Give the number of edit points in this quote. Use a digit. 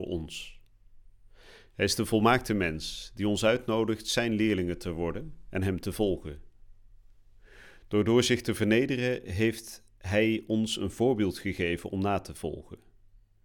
0